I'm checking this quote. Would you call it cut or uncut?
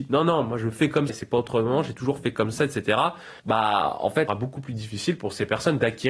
cut